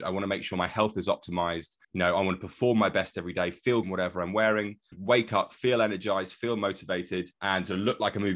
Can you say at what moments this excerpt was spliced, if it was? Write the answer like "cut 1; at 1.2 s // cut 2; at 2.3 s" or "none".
cut 1; at 1.8 s // cut 2; at 3.8 s // cut 3; at 4.9 s // cut 4; at 7.3 s